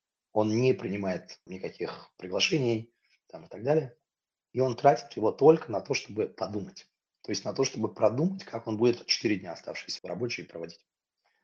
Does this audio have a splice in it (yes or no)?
yes